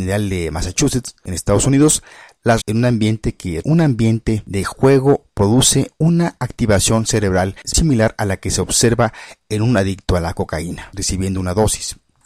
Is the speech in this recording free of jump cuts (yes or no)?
no